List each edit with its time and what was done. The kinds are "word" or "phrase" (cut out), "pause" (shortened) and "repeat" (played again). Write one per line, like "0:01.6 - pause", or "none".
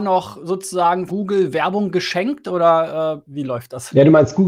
0:01.1 - word